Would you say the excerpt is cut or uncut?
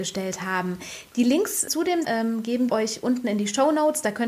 cut